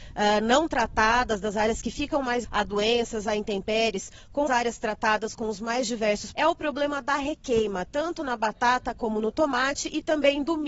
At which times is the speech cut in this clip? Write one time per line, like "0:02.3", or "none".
0:02.4
0:04.5
0:06.3